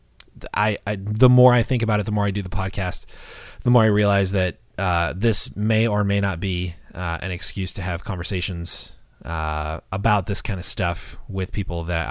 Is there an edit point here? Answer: no; 0 cuts

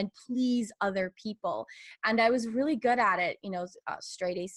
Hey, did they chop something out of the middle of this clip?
no; 0 cuts

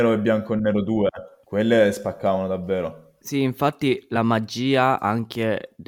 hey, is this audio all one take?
yes; 0 cuts

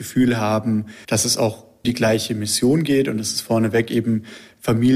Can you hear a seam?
yes; 2 cuts; at 1.0 s, 1.8 s

